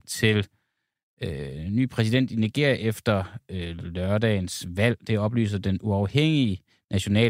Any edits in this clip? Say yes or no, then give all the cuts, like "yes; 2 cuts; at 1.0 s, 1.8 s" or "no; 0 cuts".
no; 0 cuts